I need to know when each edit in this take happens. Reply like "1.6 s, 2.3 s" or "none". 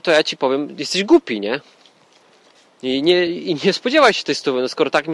none